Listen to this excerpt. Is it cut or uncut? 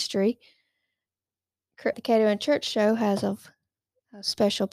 cut